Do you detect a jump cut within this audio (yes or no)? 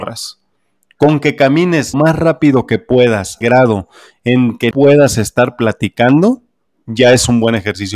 yes